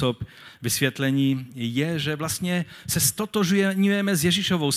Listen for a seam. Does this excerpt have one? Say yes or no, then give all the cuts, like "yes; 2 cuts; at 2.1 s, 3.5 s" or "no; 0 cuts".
no; 0 cuts